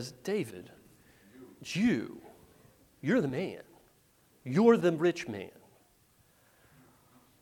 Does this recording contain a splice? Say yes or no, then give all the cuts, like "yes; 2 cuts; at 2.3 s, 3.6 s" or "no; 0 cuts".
no; 0 cuts